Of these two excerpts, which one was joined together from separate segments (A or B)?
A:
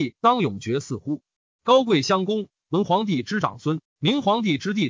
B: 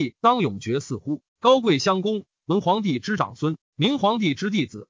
B